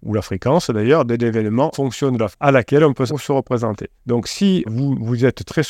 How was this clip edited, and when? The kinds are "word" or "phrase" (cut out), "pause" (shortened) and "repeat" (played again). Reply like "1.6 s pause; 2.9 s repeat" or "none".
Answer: 1.7 s word; 2.3 s word; 3.1 s phrase; 4.0 s pause; 4.7 s word